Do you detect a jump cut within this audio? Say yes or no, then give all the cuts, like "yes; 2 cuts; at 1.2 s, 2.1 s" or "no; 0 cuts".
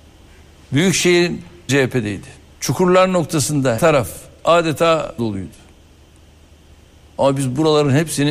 yes; 4 cuts; at 1.7 s, 2.5 s, 3.8 s, 5.2 s